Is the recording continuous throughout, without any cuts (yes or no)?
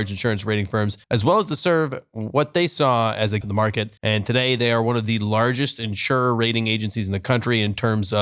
no